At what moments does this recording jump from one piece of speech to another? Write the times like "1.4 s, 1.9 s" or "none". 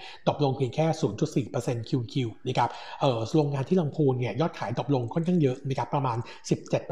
none